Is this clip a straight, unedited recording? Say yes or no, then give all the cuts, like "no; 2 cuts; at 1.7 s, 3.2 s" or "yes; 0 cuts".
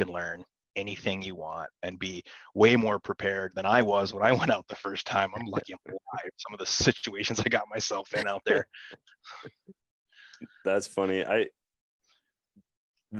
yes; 0 cuts